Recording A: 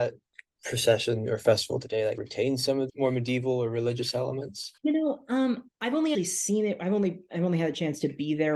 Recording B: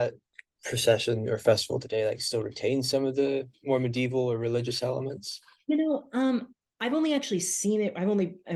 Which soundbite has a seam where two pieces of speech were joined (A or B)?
A